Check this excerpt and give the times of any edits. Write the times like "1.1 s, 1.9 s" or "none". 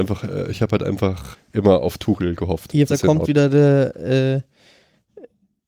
1.3 s, 2.9 s